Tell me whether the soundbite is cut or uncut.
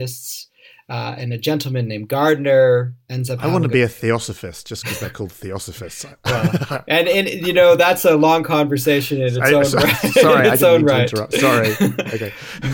uncut